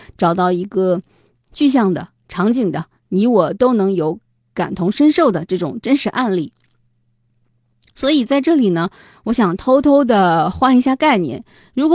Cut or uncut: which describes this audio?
uncut